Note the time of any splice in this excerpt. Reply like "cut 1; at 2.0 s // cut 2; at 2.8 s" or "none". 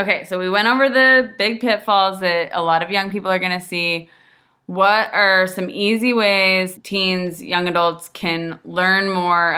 cut 1; at 6.8 s

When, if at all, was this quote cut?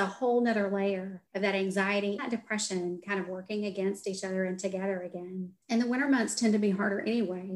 cut 1; at 1.3 s // cut 2; at 2.2 s // cut 3; at 5.6 s

